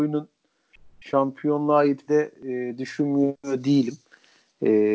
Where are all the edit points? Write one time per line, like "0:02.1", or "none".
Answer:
0:02.1